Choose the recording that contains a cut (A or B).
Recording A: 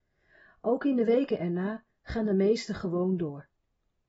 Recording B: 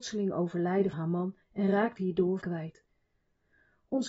B